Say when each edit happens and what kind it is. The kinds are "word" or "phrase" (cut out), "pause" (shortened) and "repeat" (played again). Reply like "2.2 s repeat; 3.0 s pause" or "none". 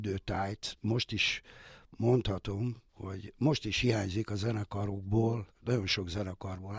2.9 s pause; 5.5 s pause